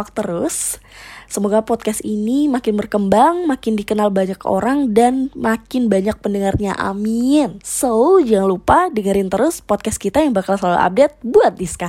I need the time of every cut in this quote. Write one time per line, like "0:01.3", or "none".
none